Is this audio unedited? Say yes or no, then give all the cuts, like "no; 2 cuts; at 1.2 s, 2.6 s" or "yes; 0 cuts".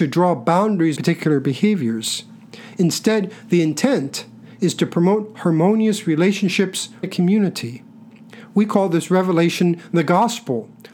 no; 2 cuts; at 1.0 s, 7.0 s